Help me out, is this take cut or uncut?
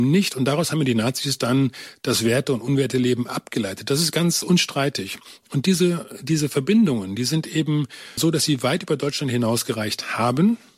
uncut